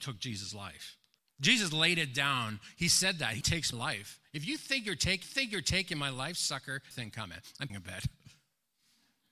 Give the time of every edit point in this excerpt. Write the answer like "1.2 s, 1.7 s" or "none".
1.2 s, 3.4 s, 3.7 s, 5.2 s, 6.9 s, 7.7 s